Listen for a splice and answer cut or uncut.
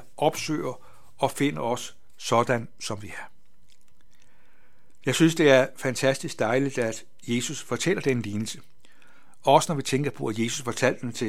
uncut